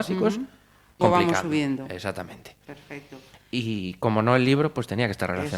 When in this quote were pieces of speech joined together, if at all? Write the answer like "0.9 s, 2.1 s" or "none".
1.0 s